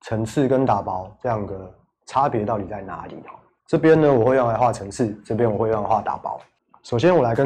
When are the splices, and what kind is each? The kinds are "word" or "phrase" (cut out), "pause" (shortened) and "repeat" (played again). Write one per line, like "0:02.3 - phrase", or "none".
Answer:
none